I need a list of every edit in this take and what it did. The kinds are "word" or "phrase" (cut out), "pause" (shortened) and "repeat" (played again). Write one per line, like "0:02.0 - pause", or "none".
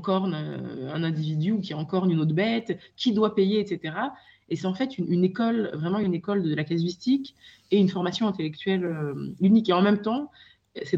none